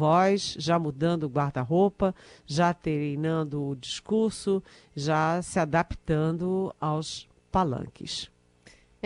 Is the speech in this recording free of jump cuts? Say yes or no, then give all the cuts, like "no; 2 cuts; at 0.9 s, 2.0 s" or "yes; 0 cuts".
yes; 0 cuts